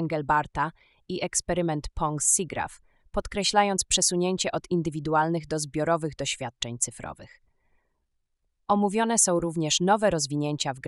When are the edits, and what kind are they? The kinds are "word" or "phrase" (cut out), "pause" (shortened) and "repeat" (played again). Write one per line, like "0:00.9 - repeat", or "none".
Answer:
none